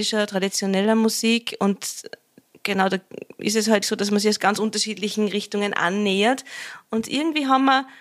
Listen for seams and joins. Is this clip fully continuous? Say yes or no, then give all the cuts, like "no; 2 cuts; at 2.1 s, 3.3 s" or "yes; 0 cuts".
no; 1 cut; at 3.8 s